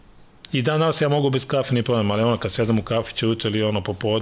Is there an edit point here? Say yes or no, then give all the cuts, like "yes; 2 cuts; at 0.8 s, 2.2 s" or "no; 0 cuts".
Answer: no; 0 cuts